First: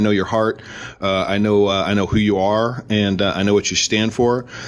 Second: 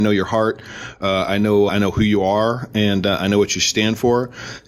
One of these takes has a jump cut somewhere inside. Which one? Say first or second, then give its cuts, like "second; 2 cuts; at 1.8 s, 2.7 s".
second; 1 cut; at 1.7 s